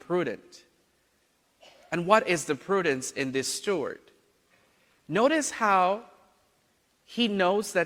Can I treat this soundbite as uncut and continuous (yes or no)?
yes